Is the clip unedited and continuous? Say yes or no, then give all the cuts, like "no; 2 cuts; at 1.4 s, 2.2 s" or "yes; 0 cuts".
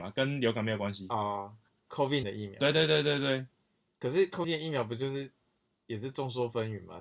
no; 2 cuts; at 2.2 s, 4.4 s